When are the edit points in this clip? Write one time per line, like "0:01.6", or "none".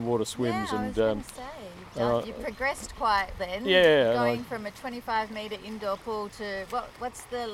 0:03.3